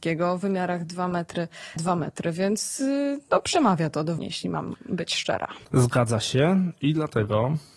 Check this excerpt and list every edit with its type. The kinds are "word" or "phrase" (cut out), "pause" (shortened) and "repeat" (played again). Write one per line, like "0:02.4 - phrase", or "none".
0:01.8 - word
0:04.2 - word
0:05.6 - pause

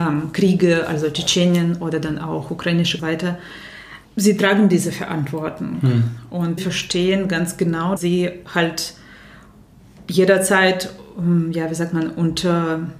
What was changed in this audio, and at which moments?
0:03.0 - phrase
0:04.0 - pause
0:06.6 - word
0:08.0 - word

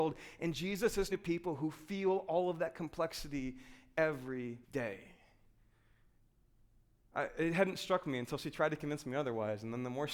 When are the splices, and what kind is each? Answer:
0:01.1 - word
0:04.6 - pause

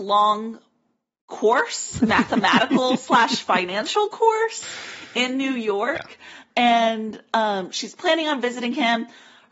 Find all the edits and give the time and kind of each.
none

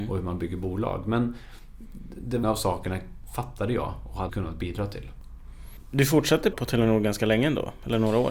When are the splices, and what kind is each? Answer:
0:02.4 - word
0:04.3 - word
0:06.5 - word

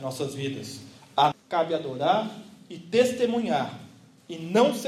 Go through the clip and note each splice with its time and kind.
0:01.3 - word

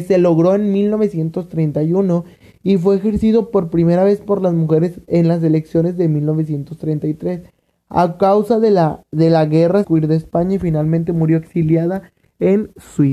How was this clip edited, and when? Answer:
0:09.8 - phrase

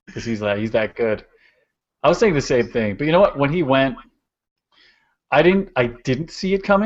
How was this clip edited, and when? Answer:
none

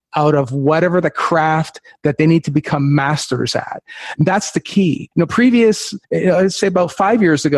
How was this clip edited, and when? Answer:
0:05.1 - pause
0:06.0 - pause

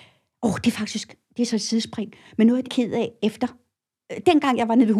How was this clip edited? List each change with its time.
0:02.6 - phrase

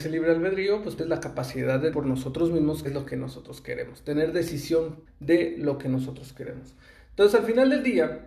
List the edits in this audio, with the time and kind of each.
0:01.0 - word
0:01.9 - word
0:02.8 - word
0:05.1 - word

